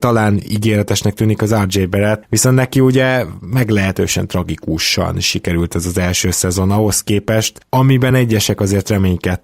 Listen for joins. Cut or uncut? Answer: uncut